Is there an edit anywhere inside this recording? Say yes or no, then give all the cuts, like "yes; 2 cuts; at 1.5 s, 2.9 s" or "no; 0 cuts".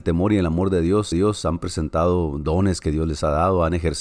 yes; 1 cut; at 1.1 s